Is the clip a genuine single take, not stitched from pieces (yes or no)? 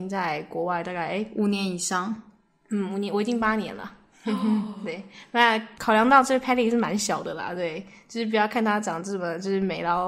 yes